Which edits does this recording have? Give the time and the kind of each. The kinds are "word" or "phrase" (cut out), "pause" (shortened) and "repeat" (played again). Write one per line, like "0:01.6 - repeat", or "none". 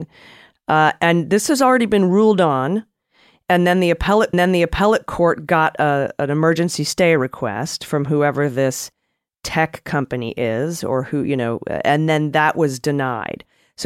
0:04.3 - repeat